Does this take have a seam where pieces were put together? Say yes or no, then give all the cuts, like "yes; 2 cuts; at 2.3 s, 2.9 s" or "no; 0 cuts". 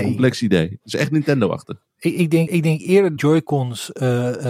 yes; 3 cuts; at 1.9 s, 2.5 s, 3.2 s